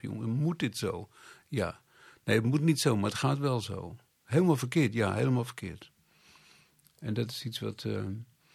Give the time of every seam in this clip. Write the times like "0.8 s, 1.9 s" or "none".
none